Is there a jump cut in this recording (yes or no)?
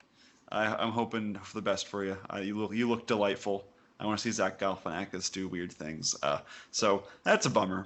no